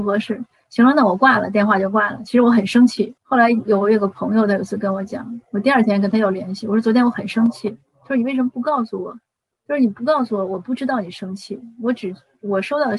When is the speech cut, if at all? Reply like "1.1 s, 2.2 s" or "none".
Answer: 3.2 s, 9.5 s